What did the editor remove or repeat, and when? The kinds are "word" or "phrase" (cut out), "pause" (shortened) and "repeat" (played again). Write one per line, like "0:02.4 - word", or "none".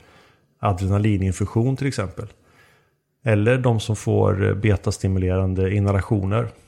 none